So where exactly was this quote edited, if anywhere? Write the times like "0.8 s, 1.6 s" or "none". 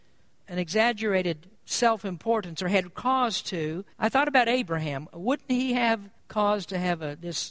1.5 s, 3.9 s, 6.2 s